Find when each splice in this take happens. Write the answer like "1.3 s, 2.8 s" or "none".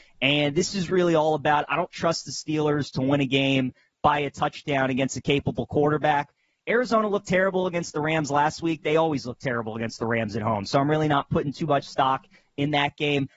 none